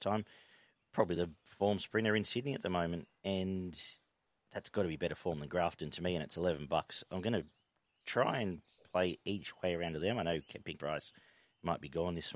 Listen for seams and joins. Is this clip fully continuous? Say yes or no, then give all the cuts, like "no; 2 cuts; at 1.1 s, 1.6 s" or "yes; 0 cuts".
no; 1 cut; at 10.8 s